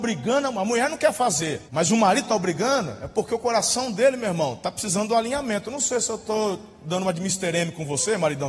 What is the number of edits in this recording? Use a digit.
1